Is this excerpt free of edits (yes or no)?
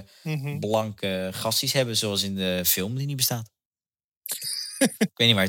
no